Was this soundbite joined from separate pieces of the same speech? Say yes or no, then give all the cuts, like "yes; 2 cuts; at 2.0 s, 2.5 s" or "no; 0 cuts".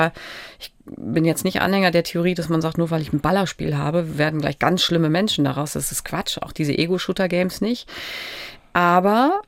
no; 0 cuts